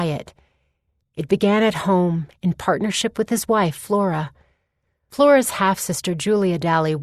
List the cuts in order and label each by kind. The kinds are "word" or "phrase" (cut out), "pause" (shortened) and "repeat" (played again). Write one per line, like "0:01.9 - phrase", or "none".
none